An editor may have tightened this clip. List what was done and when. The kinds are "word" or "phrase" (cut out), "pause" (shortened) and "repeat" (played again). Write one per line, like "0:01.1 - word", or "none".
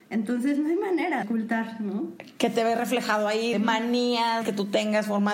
0:01.2 - word
0:03.5 - word
0:04.4 - word